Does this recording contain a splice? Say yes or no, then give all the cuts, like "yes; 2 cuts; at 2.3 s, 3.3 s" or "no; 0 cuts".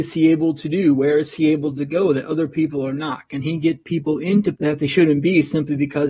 yes; 1 cut; at 4.5 s